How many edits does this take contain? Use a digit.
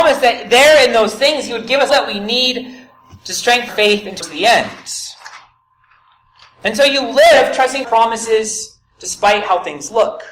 4